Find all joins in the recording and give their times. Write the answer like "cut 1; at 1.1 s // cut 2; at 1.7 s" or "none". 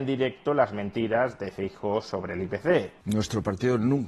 none